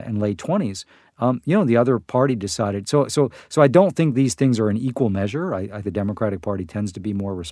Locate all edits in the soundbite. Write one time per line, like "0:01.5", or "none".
0:05.8